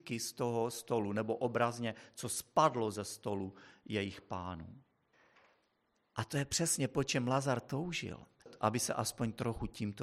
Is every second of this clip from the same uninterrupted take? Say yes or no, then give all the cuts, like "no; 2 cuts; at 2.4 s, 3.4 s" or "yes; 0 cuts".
yes; 0 cuts